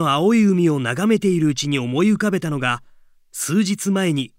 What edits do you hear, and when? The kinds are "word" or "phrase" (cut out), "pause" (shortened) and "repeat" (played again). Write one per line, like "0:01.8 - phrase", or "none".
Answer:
none